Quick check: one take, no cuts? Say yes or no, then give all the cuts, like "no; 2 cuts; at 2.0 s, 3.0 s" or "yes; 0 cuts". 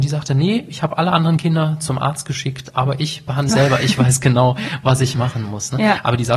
no; 1 cut; at 3.5 s